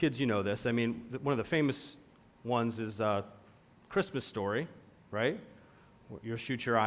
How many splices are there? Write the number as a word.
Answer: zero